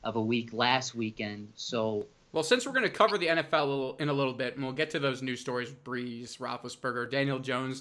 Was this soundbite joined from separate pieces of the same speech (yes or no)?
no